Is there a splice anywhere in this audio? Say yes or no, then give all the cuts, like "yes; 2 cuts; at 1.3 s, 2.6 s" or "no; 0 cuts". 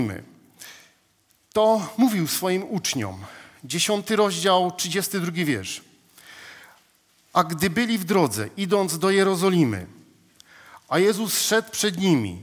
no; 0 cuts